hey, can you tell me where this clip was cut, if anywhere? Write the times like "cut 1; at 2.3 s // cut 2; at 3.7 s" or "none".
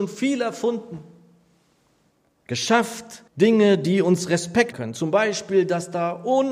cut 1; at 3.3 s // cut 2; at 4.7 s

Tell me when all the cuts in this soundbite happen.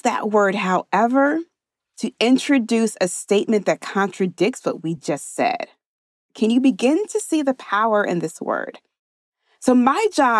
none

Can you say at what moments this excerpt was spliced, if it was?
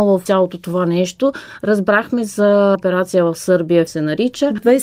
cut 1; at 2.7 s // cut 2; at 3.9 s

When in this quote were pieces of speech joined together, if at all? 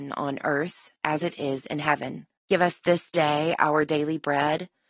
cut 1; at 1.0 s // cut 2; at 2.4 s

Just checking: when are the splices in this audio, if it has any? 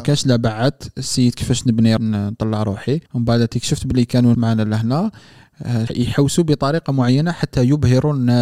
cut 1; at 2.0 s // cut 2; at 3.1 s // cut 3; at 4.3 s // cut 4; at 5.9 s

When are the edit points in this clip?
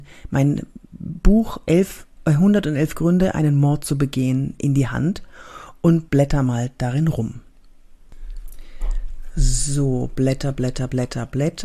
cut 1; at 6.1 s

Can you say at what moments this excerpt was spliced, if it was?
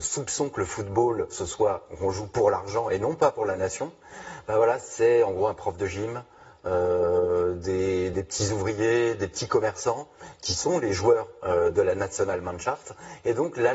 none

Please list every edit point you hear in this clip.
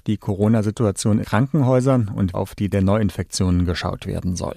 cut 1; at 1.2 s // cut 2; at 2.3 s // cut 3; at 2.7 s

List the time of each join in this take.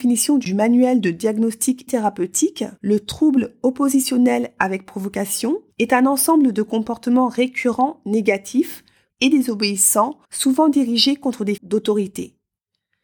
cut 1; at 1.9 s // cut 2; at 2.8 s // cut 3; at 5.7 s // cut 4; at 9.1 s // cut 5; at 10.2 s // cut 6; at 11.6 s

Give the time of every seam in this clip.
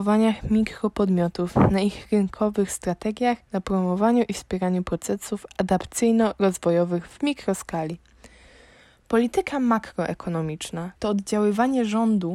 cut 1; at 3.4 s // cut 2; at 11.0 s

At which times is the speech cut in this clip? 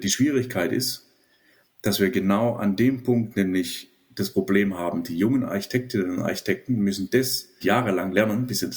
cut 1; at 7.6 s

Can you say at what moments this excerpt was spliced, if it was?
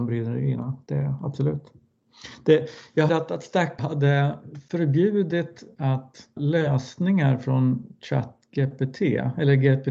cut 1; at 3.1 s // cut 2; at 3.8 s // cut 3; at 5.8 s // cut 4; at 6.4 s

